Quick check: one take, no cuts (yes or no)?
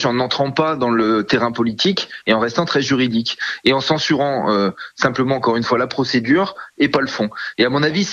yes